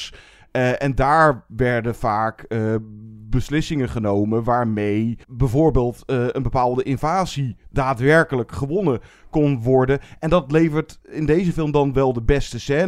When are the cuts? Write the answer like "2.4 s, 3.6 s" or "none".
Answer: 5.2 s